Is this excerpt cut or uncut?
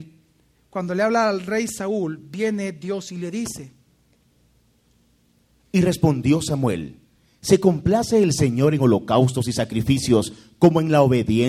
uncut